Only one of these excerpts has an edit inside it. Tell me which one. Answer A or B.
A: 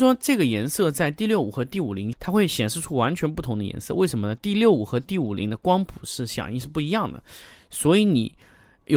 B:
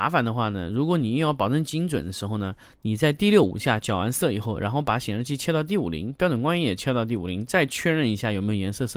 A